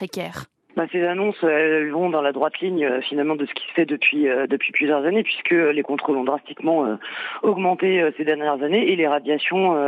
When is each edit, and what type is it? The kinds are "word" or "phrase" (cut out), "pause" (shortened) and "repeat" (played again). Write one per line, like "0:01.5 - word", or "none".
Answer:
none